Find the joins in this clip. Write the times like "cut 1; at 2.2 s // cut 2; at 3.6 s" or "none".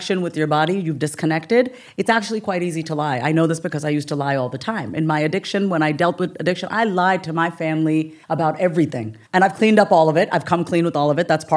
cut 1; at 8.2 s // cut 2; at 9.3 s